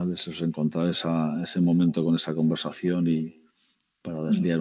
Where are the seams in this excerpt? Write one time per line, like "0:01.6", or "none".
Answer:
none